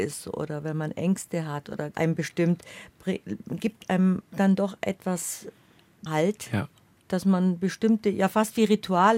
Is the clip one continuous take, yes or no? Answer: no